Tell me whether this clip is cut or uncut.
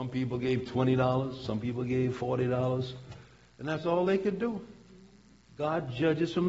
uncut